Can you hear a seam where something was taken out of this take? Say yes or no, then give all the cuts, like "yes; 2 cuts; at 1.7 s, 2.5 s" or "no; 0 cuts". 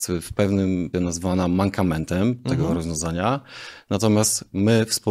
yes; 1 cut; at 0.9 s